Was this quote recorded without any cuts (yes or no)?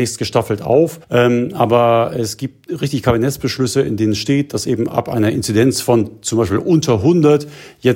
no